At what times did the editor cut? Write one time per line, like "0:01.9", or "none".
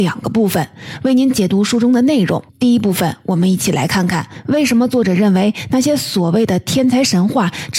0:02.5